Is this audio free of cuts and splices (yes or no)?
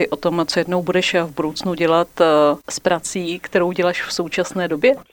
yes